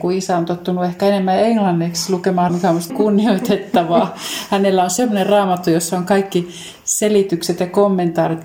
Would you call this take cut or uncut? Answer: cut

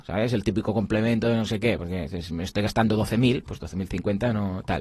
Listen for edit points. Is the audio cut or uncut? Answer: uncut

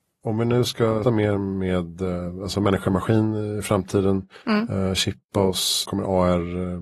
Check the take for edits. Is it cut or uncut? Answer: cut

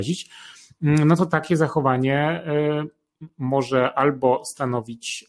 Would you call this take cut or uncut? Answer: uncut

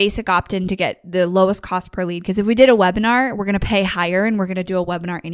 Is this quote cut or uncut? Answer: uncut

